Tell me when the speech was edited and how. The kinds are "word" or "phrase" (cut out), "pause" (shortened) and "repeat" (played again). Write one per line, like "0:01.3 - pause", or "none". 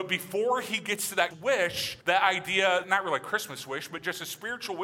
0:01.3 - word
0:02.0 - pause
0:02.8 - word